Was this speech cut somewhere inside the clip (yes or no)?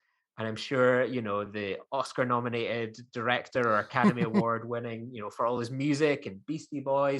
no